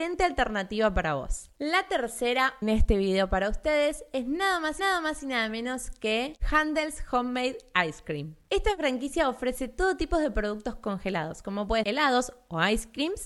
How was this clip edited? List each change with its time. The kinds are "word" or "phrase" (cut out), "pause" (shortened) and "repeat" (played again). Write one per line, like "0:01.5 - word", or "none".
0:02.6 - phrase
0:04.8 - repeat
0:11.8 - word